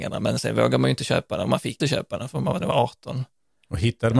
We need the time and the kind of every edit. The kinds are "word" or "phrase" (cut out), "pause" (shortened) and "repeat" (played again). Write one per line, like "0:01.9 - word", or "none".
0:01.8 - word
0:02.6 - word